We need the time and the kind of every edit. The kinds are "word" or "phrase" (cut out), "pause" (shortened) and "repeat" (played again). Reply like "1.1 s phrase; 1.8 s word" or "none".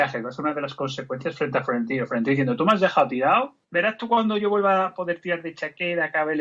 3.6 s pause